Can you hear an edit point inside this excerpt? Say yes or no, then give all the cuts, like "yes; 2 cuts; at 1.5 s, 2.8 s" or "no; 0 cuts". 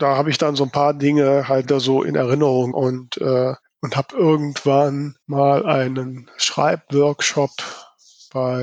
yes; 4 cuts; at 1.6 s, 2.7 s, 3.6 s, 5.2 s